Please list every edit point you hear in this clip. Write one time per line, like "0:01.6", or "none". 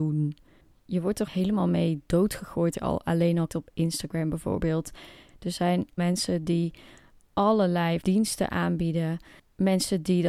0:01.3
0:02.7
0:03.5
0:06.0
0:08.0